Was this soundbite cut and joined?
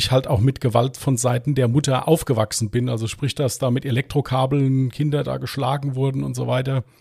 no; 0 cuts

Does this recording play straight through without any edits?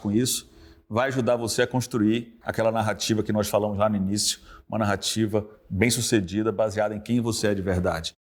yes; 0 cuts

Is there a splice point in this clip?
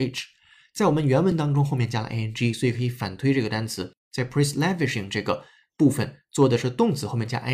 no; 0 cuts

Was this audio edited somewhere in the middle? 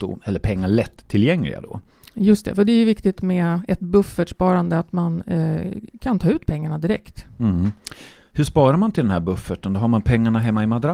no; 0 cuts

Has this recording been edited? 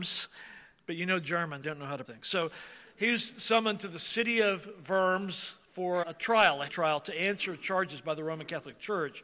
yes; 4 cuts; at 1.6 s, 2.0 s, 6.0 s, 6.7 s

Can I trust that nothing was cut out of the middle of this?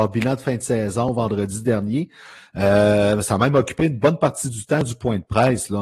yes; 0 cuts

